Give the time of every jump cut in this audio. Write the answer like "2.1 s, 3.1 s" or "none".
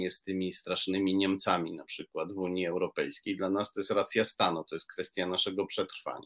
none